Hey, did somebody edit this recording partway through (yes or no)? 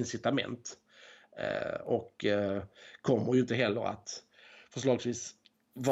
no